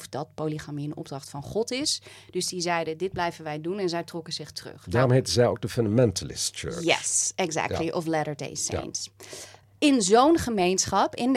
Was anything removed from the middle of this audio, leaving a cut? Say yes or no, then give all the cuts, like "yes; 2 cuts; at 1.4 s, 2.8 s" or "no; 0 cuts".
no; 0 cuts